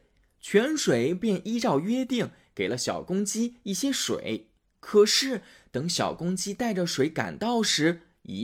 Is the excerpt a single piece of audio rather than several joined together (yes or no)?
yes